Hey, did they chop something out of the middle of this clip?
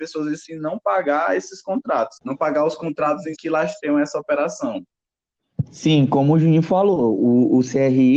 yes; 2 cuts; at 2.2 s, 3.4 s

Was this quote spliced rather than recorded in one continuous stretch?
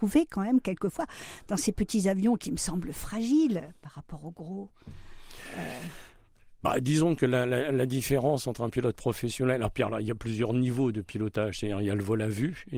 no; 0 cuts

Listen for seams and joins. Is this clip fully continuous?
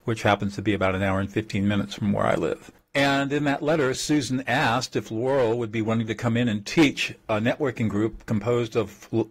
yes; 0 cuts

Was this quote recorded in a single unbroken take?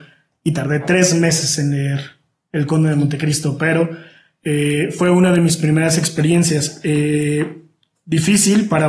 yes; 0 cuts

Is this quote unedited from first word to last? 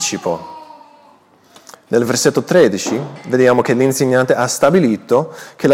yes; 0 cuts

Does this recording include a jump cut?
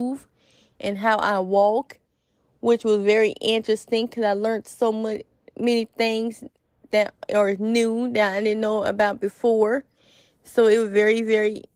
no; 0 cuts

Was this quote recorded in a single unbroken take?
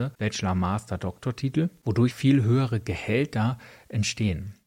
no; 1 cut; at 2.1 s

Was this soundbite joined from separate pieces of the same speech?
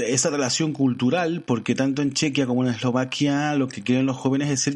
no; 0 cuts

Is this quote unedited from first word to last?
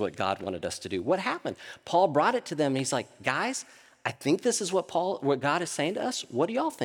yes; 0 cuts

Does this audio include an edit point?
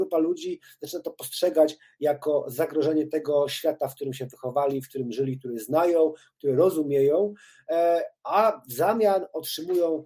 no; 0 cuts

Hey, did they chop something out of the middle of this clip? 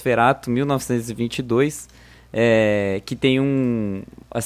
no; 0 cuts

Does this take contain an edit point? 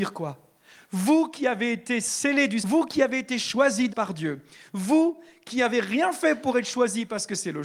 yes; 2 cuts; at 2.6 s, 3.9 s

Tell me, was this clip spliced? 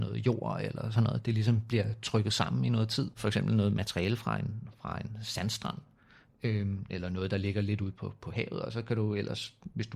no; 0 cuts

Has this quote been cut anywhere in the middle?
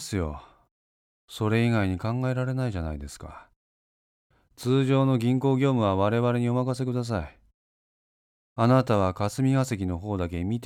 no; 0 cuts

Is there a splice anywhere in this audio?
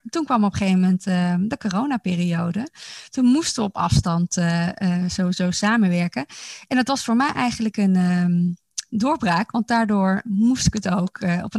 no; 0 cuts

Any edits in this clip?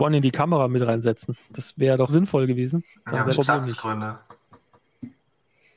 yes; 4 cuts; at 1.4 s, 2.1 s, 2.9 s, 3.3 s

